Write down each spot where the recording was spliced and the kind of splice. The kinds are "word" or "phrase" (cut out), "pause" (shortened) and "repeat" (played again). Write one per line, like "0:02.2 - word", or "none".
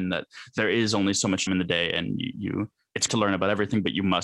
0:01.5 - word
0:03.1 - word